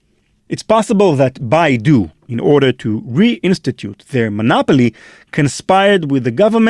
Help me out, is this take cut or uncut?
uncut